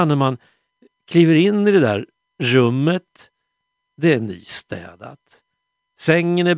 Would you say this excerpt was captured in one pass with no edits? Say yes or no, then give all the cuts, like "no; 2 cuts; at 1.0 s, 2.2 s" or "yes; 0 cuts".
yes; 0 cuts